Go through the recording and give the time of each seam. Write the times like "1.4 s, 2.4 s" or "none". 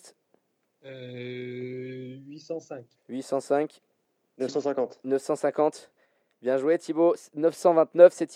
3.0 s